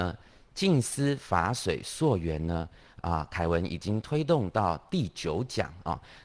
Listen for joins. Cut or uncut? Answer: uncut